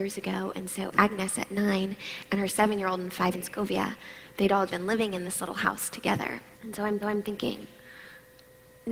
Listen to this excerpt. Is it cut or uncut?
cut